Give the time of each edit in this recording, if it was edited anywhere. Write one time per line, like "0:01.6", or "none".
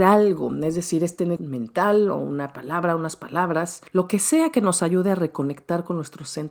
0:01.4
0:03.9